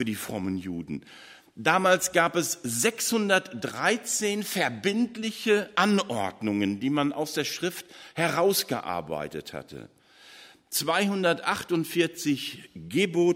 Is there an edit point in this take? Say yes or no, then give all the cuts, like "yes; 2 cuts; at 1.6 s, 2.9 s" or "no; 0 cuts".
no; 0 cuts